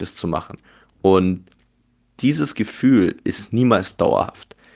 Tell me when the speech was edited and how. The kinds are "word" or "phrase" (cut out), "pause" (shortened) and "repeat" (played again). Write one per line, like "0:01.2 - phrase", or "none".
none